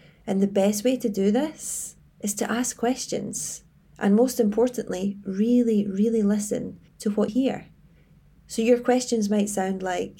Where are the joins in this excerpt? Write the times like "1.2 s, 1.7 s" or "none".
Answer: 2.0 s, 3.9 s, 6.9 s, 7.3 s